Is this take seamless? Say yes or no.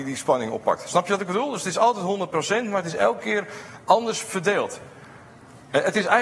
yes